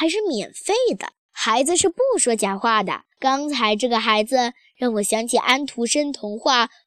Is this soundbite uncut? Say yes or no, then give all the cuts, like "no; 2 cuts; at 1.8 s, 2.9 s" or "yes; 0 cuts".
no; 2 cuts; at 1.2 s, 3.1 s